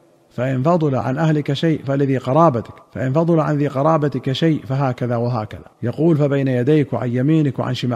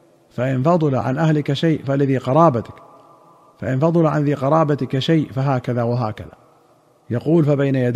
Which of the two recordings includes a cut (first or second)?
first